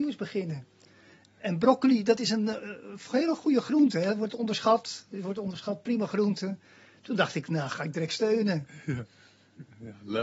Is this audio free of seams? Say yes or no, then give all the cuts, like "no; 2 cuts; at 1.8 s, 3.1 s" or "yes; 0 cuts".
yes; 0 cuts